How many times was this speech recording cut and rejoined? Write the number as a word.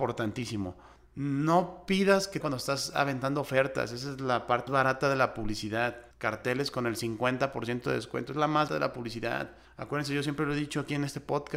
six